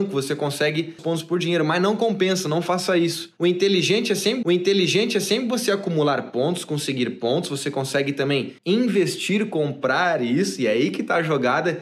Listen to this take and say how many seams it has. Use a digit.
3